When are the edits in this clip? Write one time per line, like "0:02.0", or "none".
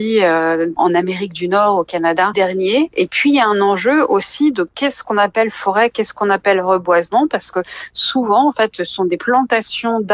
0:02.3